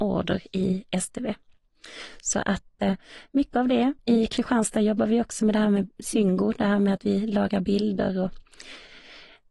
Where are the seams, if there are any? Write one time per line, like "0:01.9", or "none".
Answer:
0:04.0